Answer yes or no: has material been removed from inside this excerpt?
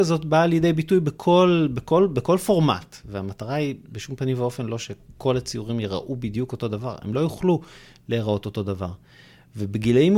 no